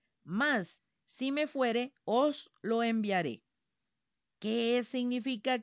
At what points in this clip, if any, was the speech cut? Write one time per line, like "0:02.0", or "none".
none